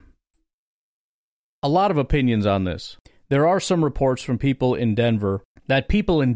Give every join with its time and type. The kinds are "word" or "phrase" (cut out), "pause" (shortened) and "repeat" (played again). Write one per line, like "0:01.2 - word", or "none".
none